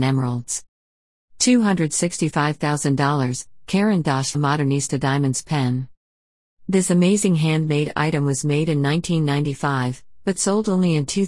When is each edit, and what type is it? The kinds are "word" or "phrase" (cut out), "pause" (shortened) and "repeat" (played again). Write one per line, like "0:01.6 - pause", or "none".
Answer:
0:04.3 - word